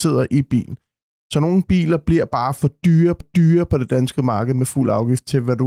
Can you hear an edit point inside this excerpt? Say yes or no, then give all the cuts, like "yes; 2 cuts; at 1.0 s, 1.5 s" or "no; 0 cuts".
yes; 1 cut; at 3.2 s